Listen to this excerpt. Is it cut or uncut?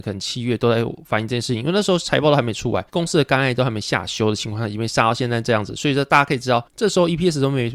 cut